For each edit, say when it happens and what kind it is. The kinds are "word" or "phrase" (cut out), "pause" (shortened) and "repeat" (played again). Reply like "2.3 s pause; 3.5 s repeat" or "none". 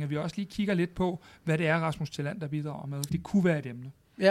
3.1 s word